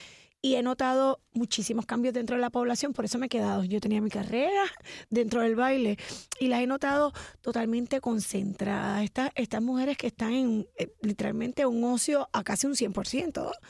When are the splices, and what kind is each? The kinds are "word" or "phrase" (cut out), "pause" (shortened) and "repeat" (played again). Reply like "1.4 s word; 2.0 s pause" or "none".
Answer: none